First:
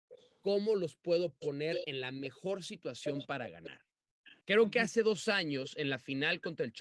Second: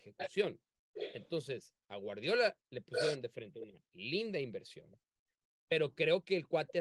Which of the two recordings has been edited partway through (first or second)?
first